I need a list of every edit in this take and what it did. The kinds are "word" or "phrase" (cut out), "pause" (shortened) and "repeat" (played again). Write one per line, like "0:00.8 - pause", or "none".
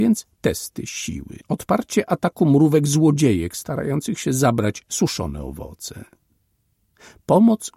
0:01.4 - pause